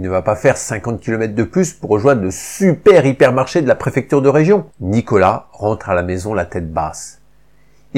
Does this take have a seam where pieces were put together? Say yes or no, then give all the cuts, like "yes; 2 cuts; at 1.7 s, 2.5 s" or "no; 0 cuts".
yes; 1 cut; at 4.7 s